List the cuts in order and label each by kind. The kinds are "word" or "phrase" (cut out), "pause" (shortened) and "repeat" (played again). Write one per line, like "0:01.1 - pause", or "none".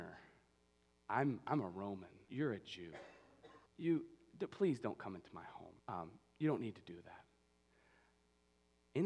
0:02.3 - word
0:03.7 - pause
0:05.8 - pause